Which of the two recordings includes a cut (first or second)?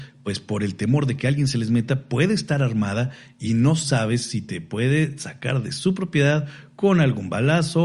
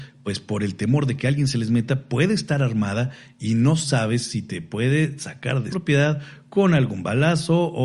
second